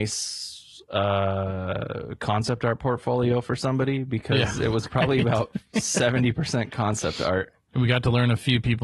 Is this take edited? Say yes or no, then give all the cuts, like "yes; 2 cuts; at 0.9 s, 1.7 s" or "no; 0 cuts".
no; 0 cuts